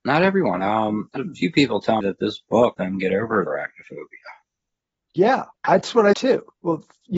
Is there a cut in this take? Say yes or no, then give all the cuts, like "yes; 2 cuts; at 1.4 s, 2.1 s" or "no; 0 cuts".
yes; 6 cuts; at 1.2 s, 2.0 s, 2.7 s, 3.5 s, 5.5 s, 6.1 s